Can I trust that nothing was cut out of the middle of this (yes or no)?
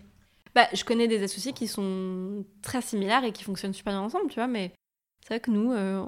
yes